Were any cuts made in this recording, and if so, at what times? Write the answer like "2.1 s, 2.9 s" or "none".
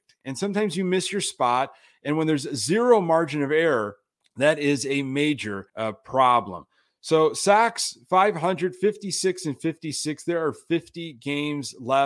5.7 s